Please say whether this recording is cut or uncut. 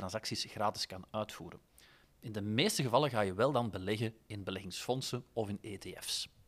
uncut